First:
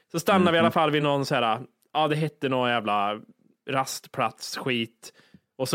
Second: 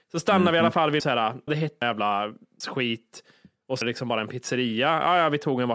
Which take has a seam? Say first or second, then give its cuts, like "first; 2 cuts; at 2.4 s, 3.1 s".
second; 5 cuts; at 1.0 s, 1.5 s, 1.8 s, 2.6 s, 3.8 s